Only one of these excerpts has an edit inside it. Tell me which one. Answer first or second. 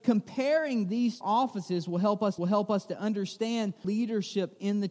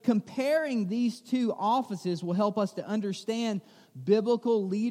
first